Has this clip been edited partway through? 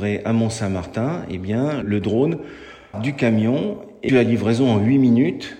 yes; 3 cuts; at 1.8 s, 2.9 s, 4.1 s

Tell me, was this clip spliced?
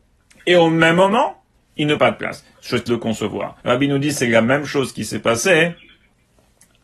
yes; 4 cuts; at 1.5 s, 2.0 s, 2.9 s, 3.6 s

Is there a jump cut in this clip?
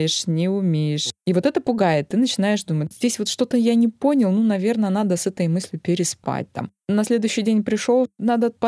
no; 0 cuts

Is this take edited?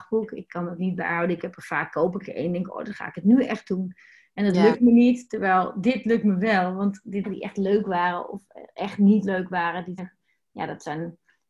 yes; 2 cuts; at 7.2 s, 10.0 s

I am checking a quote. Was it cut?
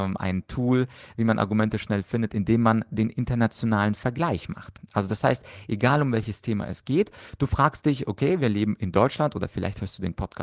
no; 0 cuts

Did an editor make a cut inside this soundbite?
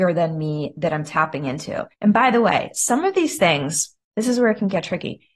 yes; 2 cuts; at 1.9 s, 4.0 s

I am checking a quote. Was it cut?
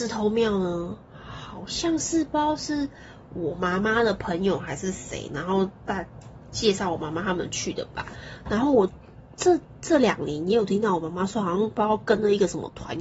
no; 0 cuts

